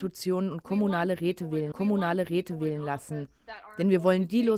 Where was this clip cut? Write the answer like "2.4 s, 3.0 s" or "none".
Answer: 1.7 s